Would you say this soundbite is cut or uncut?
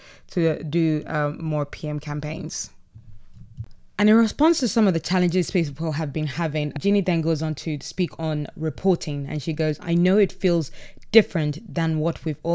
uncut